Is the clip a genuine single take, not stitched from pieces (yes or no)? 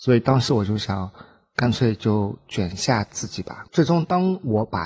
no